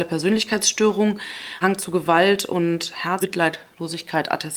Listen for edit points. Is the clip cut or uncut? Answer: cut